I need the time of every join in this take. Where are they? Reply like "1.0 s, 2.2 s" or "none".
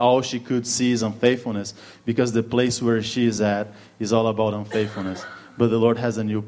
none